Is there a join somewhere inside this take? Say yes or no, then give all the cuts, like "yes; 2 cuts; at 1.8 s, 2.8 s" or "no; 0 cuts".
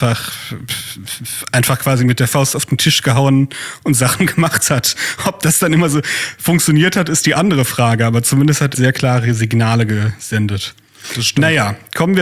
yes; 1 cut; at 8.7 s